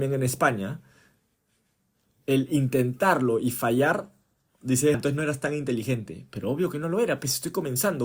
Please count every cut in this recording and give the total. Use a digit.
1